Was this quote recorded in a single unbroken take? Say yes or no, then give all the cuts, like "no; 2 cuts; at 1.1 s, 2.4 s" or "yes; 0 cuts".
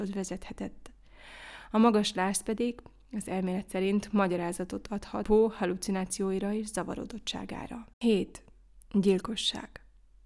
no; 1 cut; at 7.9 s